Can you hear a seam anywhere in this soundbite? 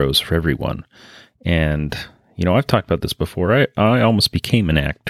no; 0 cuts

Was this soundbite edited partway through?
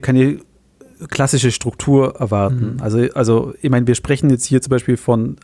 no; 0 cuts

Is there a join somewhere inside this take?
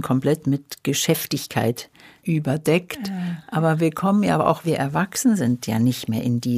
yes; 2 cuts; at 2.2 s, 4.6 s

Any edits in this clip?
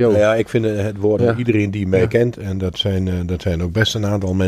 yes; 1 cut; at 1.2 s

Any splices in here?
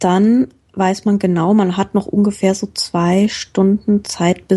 no; 0 cuts

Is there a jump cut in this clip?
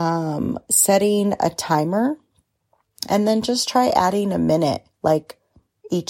yes; 1 cut; at 4.9 s

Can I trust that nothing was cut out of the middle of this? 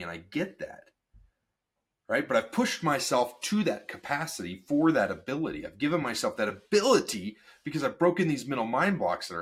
yes; 0 cuts

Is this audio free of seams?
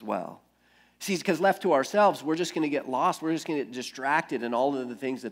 yes; 0 cuts

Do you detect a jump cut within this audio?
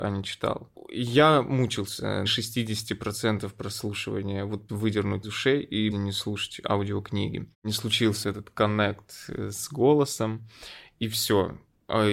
yes; 6 cuts; at 2.3 s, 4.7 s, 5.2 s, 5.9 s, 7.5 s, 8.2 s

